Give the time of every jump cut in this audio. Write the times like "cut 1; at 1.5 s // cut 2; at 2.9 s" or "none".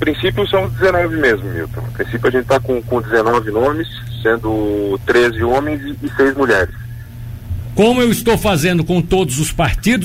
none